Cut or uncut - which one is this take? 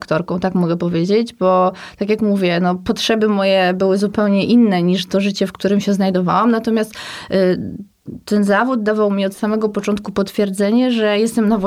uncut